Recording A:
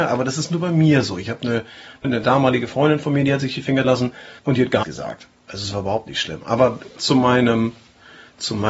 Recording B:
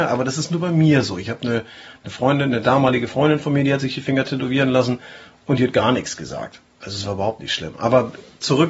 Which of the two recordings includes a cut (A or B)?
A